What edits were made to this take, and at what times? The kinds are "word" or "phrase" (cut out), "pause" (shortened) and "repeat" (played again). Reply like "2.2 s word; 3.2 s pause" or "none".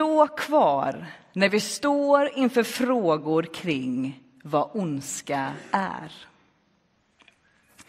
none